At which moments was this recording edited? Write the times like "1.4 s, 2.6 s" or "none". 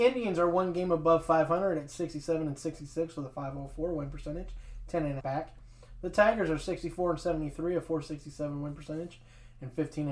5.2 s